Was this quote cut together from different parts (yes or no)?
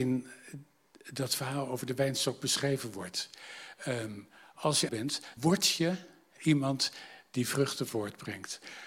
yes